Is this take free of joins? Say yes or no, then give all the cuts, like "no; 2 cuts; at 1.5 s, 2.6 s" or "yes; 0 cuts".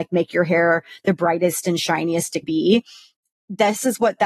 no; 1 cut; at 2.4 s